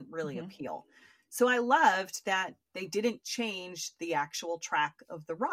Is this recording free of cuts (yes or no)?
yes